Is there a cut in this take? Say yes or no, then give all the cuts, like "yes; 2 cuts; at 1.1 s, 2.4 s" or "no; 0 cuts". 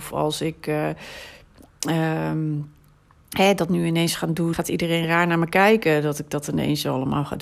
yes; 1 cut; at 4.5 s